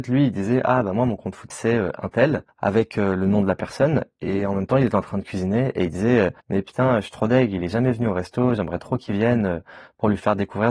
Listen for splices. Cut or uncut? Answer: cut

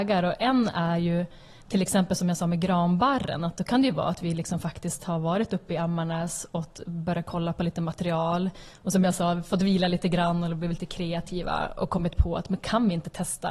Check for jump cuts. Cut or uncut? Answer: uncut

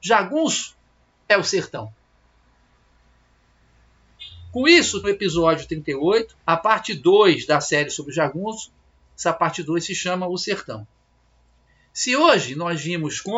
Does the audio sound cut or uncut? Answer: cut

